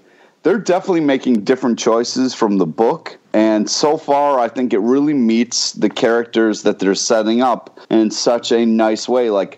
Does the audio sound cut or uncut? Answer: cut